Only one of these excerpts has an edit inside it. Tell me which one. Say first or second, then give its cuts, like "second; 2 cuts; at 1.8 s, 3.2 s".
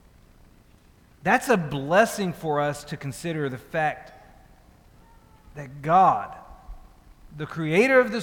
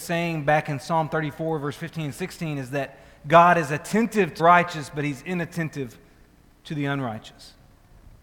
second; 1 cut; at 4.4 s